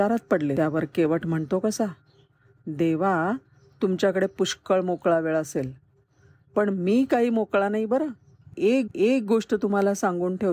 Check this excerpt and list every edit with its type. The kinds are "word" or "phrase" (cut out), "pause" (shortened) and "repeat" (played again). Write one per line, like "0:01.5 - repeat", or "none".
0:08.9 - repeat